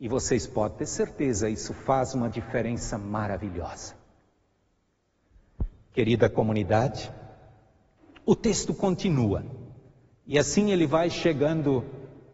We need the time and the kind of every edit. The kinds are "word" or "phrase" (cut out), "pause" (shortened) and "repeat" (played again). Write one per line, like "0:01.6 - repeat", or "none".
none

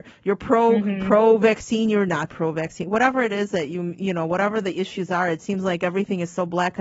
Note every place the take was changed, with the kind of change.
none

